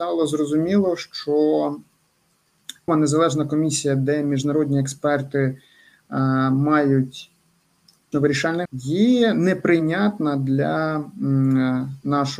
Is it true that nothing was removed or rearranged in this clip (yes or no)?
no